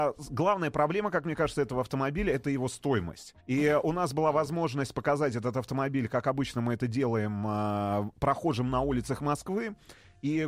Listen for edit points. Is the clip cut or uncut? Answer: cut